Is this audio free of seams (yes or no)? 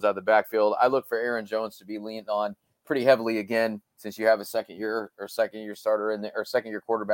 yes